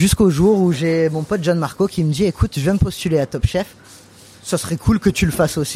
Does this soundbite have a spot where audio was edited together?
no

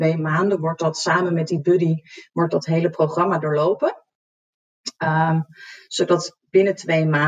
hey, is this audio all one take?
yes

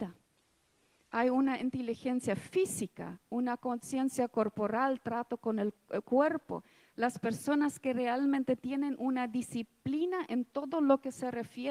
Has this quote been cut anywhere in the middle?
no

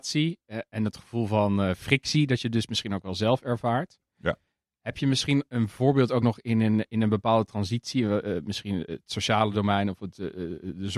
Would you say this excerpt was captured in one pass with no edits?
yes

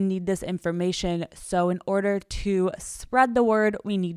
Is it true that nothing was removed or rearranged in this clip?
yes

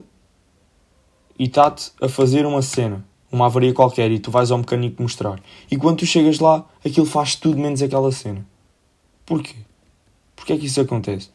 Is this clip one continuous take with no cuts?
no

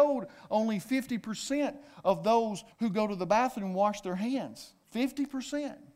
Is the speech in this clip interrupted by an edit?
yes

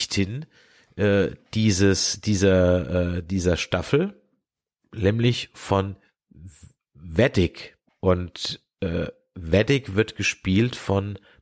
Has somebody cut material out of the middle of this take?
yes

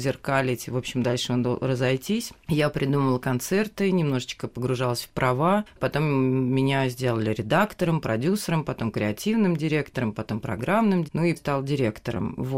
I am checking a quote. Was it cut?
yes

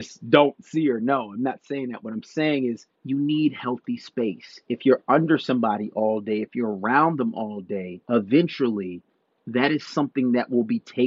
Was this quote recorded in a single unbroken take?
no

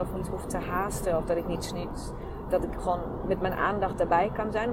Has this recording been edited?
no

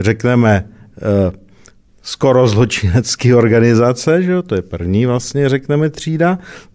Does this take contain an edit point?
no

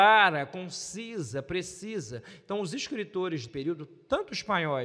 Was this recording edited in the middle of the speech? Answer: yes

